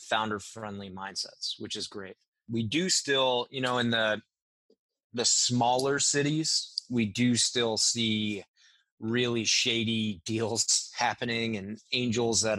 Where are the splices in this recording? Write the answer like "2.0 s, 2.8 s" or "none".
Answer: none